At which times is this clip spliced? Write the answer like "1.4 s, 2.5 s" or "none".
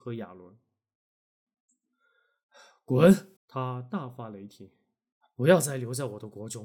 3.4 s, 5.2 s